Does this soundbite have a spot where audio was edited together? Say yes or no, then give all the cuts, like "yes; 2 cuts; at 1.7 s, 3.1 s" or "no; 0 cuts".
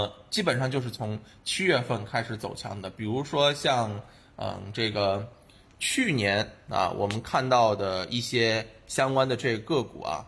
no; 0 cuts